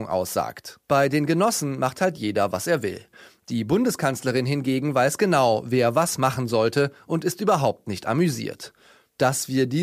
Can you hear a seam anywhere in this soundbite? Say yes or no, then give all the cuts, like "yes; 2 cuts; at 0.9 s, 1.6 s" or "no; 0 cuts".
no; 0 cuts